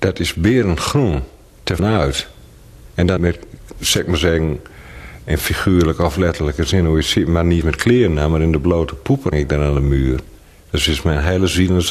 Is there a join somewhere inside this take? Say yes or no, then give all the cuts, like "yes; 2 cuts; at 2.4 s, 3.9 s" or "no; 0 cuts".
yes; 4 cuts; at 1.8 s, 3.2 s, 7.6 s, 9.3 s